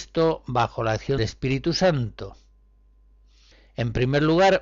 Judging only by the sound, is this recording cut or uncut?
cut